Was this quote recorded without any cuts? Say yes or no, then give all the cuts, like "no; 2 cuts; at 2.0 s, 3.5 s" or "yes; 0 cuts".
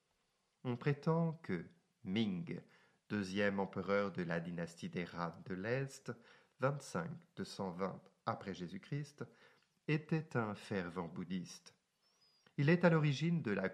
yes; 0 cuts